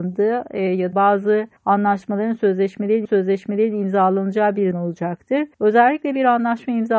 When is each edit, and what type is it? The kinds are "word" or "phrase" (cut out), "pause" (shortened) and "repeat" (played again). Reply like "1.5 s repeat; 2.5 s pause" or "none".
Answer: 0.9 s word; 1.6 s pause; 3.0 s repeat; 4.7 s word; 5.5 s pause